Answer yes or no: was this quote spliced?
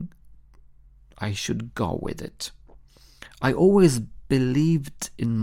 no